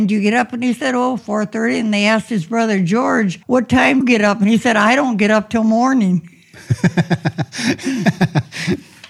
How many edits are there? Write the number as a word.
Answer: three